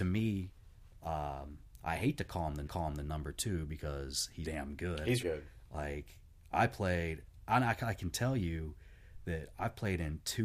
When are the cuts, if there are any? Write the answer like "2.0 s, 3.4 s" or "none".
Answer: 2.7 s, 4.4 s, 5.2 s